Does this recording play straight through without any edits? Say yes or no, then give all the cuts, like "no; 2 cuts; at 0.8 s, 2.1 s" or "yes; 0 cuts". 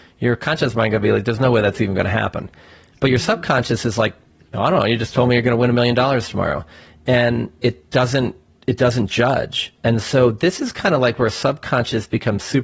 no; 1 cut; at 8.5 s